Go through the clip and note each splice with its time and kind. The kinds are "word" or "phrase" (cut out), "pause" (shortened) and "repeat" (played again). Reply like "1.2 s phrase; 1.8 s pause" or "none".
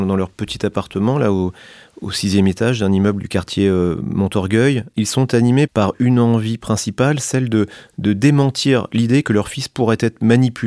none